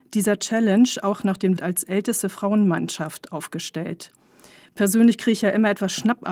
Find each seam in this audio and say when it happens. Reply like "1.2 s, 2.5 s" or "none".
1.6 s